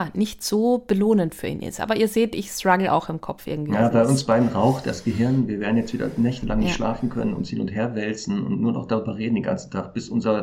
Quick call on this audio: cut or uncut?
uncut